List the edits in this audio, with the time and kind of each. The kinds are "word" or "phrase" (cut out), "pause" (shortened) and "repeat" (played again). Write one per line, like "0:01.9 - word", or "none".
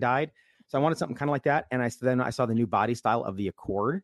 none